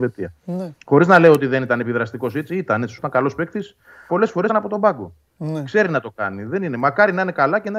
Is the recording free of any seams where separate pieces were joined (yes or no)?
no